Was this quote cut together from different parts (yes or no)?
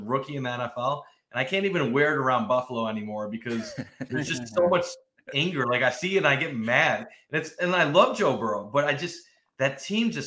no